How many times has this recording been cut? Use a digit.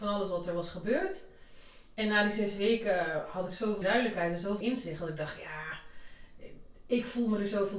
2